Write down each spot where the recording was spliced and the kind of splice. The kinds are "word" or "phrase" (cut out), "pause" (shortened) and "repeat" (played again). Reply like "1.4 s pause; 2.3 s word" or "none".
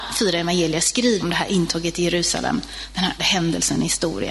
1.2 s word; 3.2 s word